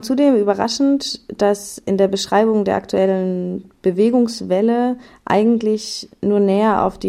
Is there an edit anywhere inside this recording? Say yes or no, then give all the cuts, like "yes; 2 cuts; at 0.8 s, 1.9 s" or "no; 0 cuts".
no; 0 cuts